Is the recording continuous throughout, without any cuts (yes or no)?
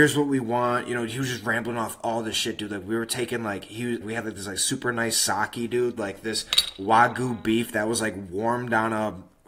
no